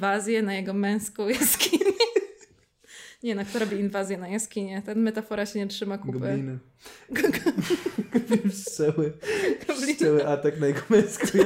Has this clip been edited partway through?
no; 0 cuts

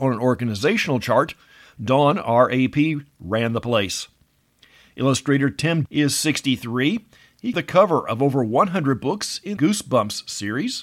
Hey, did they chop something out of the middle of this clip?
yes; 3 cuts; at 5.9 s, 7.5 s, 9.6 s

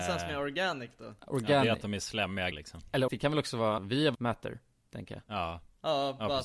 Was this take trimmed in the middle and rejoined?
yes; 7 cuts; at 1.2 s, 2.5 s, 3.1 s, 3.8 s, 4.1 s, 4.8 s, 5.3 s

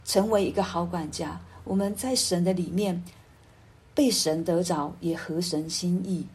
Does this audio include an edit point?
no; 0 cuts

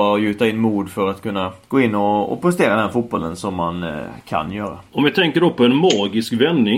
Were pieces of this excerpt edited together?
yes; 2 cuts; at 1.6 s, 4.9 s

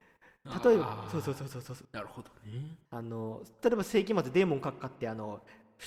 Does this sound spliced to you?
yes; 2 cuts; at 1.8 s, 2.9 s

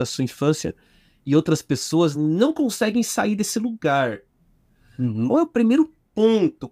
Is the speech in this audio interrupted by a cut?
no; 0 cuts

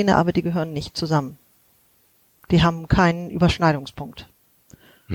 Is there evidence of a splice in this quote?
no; 0 cuts

